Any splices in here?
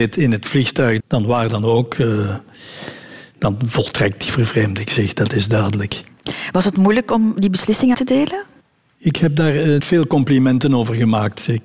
yes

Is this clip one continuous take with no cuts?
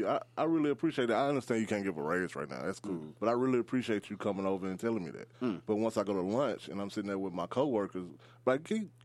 no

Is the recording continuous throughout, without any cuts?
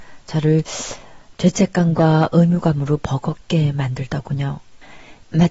yes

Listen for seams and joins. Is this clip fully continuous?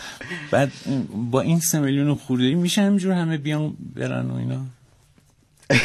yes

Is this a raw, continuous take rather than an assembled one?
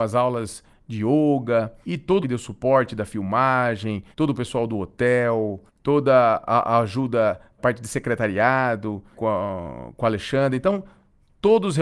no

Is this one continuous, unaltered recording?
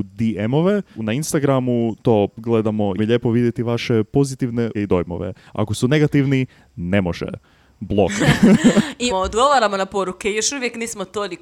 no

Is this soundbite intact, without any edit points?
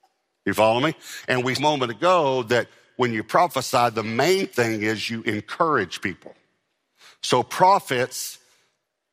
no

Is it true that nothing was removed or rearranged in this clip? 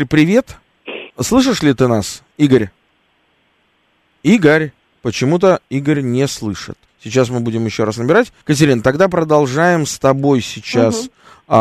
no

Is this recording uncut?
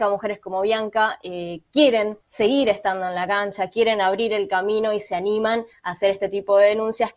no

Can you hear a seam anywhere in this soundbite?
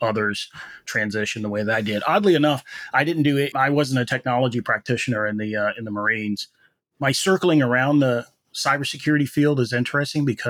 yes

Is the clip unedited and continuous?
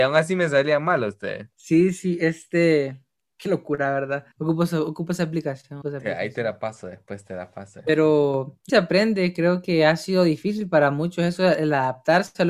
no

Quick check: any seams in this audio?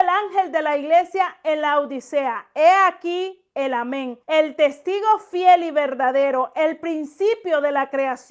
yes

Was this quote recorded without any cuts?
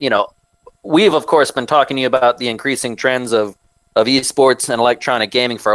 yes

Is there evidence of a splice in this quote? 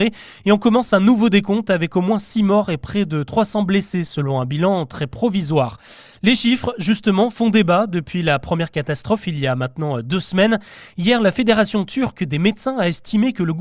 no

